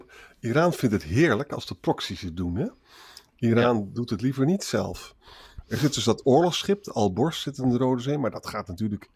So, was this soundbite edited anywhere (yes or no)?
no